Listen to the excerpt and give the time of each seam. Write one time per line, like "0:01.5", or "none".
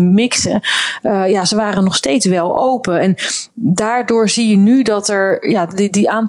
none